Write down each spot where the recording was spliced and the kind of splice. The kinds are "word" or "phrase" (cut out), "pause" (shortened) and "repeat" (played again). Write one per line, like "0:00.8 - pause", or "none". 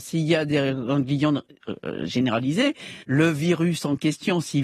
0:03.0 - pause